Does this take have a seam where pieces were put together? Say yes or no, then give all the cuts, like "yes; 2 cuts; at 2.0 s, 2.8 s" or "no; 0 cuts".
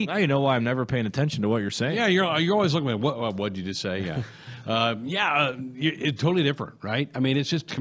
no; 0 cuts